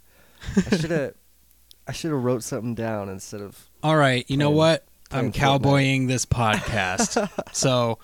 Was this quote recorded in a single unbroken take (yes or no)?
yes